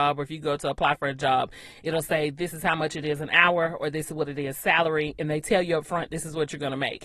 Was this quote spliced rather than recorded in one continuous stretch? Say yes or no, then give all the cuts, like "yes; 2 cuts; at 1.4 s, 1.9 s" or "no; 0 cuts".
no; 0 cuts